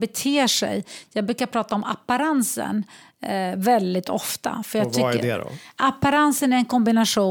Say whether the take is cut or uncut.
uncut